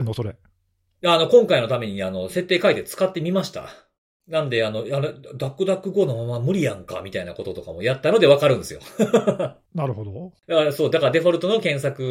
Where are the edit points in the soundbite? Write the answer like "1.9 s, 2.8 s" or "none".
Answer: 3.9 s

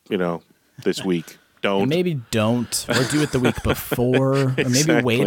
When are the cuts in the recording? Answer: none

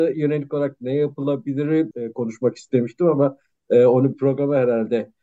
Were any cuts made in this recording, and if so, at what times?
1.9 s, 4.1 s

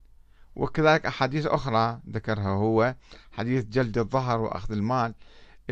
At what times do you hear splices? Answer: none

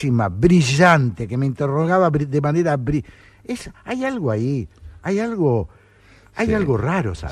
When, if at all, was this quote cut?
none

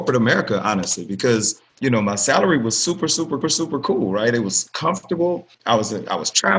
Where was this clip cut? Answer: 1.7 s, 3.4 s, 5.5 s

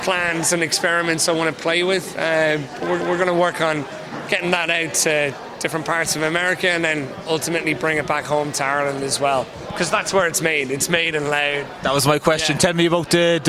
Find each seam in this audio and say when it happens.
3.0 s

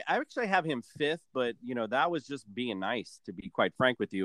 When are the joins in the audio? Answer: none

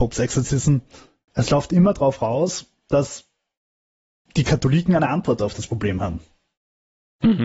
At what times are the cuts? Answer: none

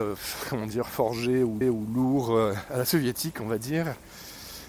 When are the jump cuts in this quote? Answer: 1.6 s

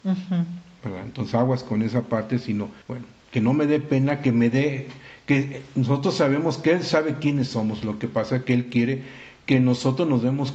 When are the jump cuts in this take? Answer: 2.8 s

